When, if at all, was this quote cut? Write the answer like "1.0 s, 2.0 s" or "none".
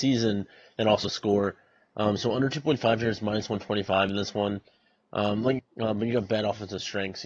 1.0 s, 5.6 s